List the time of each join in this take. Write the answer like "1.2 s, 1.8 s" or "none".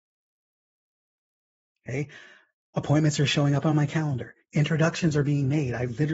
none